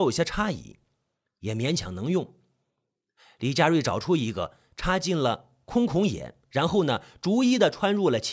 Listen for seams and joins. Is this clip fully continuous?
yes; 0 cuts

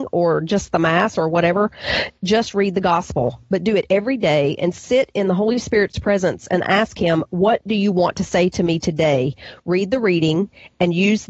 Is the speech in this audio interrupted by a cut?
no; 0 cuts

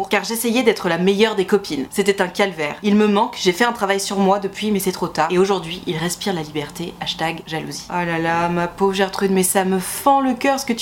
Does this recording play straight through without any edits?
yes; 0 cuts

